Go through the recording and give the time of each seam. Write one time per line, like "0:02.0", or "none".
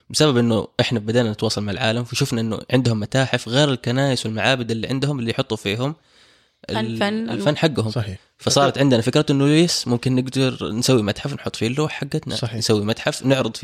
none